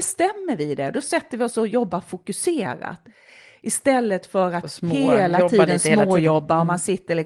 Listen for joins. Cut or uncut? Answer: uncut